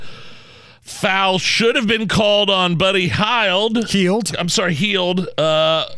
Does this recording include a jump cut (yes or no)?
no